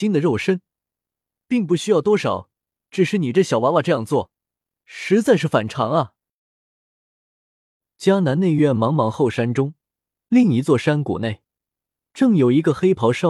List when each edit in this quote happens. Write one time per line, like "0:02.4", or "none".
none